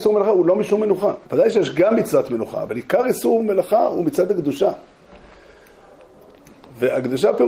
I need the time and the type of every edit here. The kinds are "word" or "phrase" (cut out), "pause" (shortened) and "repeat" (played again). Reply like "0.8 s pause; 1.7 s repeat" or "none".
1.2 s pause